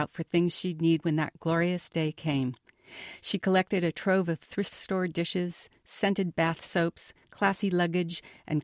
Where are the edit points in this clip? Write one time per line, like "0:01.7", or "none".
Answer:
none